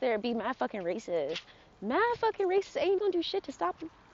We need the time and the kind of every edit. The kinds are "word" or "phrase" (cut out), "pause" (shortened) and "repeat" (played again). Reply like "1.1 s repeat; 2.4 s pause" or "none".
3.0 s word

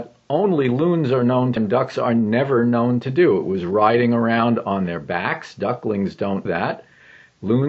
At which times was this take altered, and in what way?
1.6 s word; 6.5 s word

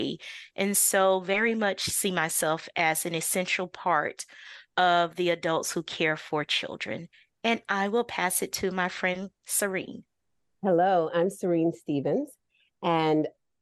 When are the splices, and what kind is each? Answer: none

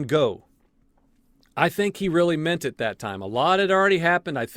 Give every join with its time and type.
none

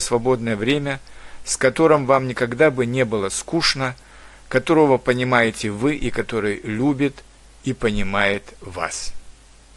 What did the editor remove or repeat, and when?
none

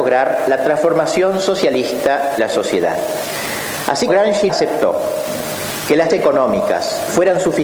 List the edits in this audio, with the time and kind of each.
2.4 s word; 4.1 s word; 4.5 s word; 6.1 s word

